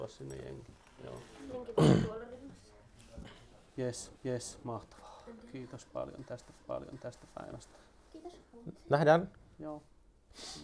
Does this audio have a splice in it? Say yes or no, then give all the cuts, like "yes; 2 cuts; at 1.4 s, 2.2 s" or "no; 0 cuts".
yes; 2 cuts; at 4.1 s, 6.6 s